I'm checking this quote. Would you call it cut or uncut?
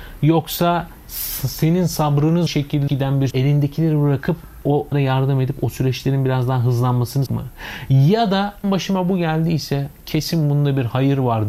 cut